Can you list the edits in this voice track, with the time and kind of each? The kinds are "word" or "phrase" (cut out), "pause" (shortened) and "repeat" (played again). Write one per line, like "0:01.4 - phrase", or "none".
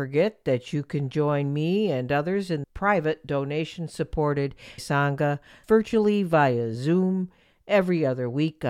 0:02.6 - word
0:04.8 - word
0:05.6 - phrase